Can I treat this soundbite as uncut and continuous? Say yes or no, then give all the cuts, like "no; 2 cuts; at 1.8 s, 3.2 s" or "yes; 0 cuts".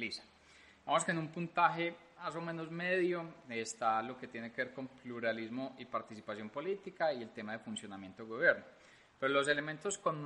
yes; 0 cuts